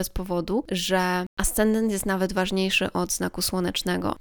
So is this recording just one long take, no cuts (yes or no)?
yes